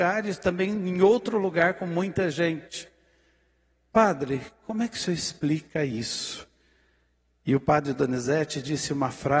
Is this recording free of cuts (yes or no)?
yes